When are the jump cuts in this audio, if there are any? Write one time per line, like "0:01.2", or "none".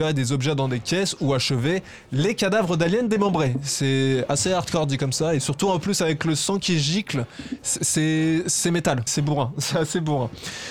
0:09.1

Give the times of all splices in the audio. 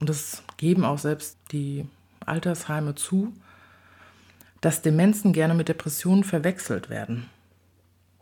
0:01.3

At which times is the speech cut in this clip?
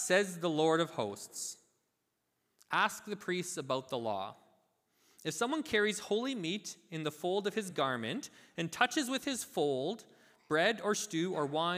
none

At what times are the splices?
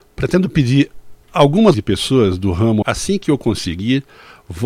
0:01.7
0:02.8

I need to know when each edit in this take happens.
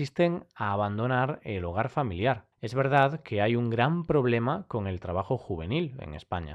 0:02.5

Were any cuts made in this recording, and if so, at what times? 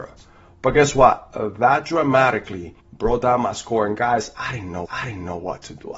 0:02.8
0:04.9

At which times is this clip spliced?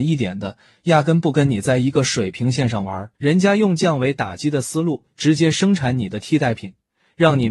0:03.1

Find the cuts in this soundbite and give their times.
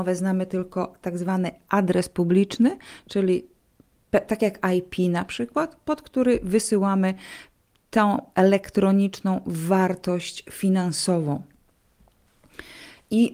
none

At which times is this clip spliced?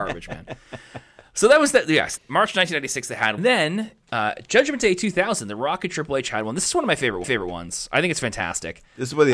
0:02.2
0:03.4
0:07.2

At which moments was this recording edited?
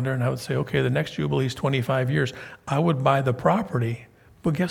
none

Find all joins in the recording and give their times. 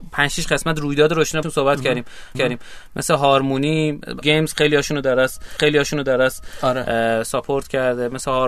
0:01.4
0:02.3
0:04.2
0:05.6

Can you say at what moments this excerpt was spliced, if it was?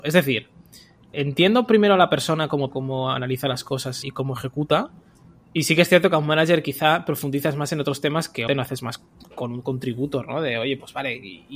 0:01.1
0:02.7
0:04.0
0:08.5

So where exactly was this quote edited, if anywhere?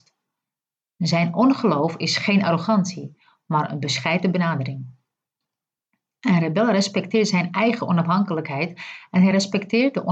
none

